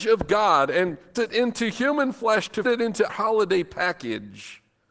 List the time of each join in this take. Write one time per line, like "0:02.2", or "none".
0:01.2
0:02.6
0:03.1